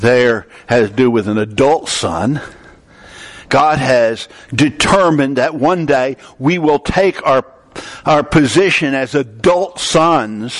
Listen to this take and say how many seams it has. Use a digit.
0